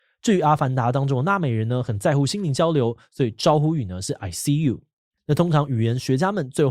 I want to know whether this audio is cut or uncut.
uncut